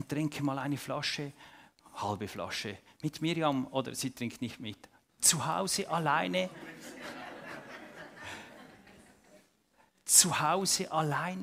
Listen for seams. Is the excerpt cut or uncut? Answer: uncut